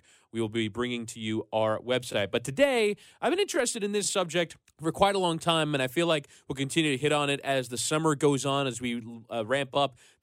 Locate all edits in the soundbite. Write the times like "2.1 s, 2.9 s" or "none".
none